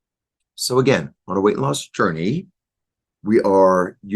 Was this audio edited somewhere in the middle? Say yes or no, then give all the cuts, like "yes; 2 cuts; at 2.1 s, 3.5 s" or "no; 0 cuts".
no; 0 cuts